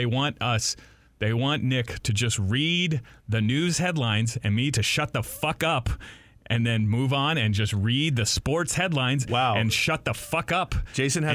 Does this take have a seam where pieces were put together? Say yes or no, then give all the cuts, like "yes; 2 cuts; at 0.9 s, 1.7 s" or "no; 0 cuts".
no; 0 cuts